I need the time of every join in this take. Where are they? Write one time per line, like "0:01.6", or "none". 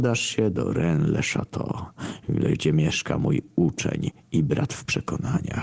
none